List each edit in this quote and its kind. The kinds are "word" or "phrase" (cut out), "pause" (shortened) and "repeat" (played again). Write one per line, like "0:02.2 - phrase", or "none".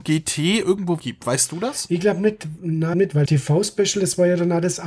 0:01.0 - phrase
0:02.9 - phrase
0:03.3 - word